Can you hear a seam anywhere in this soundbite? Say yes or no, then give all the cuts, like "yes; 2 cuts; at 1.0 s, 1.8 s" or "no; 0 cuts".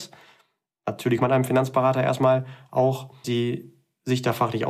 yes; 2 cuts; at 1.2 s, 3.2 s